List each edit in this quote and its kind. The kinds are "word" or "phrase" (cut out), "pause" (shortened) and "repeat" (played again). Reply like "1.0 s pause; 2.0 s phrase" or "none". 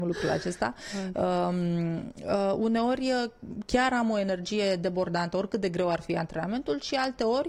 none